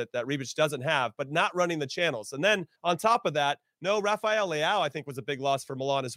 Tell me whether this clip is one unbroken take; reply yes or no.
no